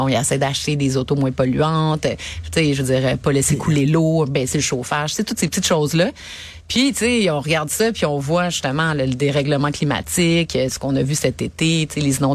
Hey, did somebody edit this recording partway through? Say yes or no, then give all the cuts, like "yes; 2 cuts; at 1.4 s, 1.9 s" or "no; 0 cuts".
no; 0 cuts